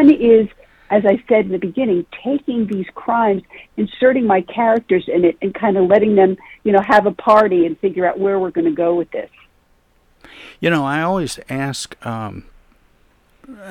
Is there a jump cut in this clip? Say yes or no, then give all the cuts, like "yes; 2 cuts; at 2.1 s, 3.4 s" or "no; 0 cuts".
no; 0 cuts